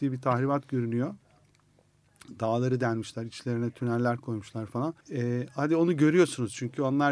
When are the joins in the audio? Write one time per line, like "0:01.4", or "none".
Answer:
0:05.0